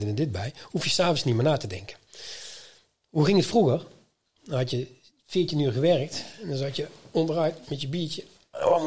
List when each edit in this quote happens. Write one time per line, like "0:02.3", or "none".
none